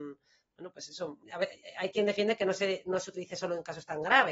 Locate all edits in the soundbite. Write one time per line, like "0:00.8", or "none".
0:01.2